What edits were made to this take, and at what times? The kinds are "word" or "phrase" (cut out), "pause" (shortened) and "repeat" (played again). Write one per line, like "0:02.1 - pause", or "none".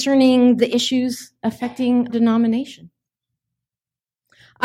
0:02.1 - word